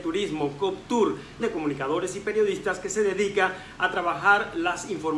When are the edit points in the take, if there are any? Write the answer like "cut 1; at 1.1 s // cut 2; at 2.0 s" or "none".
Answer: cut 1; at 1.4 s